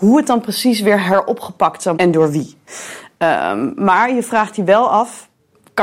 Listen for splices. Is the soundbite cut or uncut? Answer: cut